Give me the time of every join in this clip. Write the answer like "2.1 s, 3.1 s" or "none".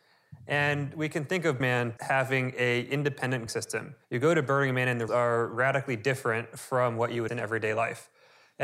1.6 s, 2.0 s, 3.5 s, 4.0 s, 5.1 s, 7.3 s